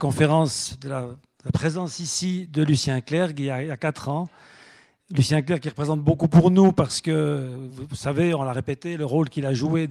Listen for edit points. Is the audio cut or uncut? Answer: uncut